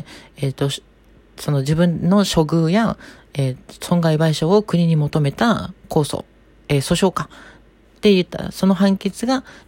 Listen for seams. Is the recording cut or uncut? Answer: uncut